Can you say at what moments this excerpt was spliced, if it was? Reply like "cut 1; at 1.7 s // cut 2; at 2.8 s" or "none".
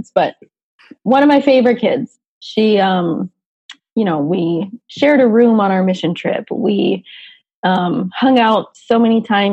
none